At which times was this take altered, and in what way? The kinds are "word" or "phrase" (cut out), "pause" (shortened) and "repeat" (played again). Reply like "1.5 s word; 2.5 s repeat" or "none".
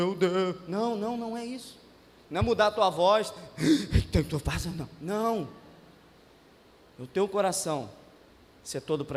none